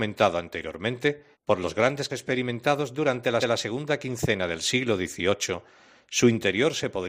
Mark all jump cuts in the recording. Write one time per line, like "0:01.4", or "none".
0:01.3
0:02.1
0:03.4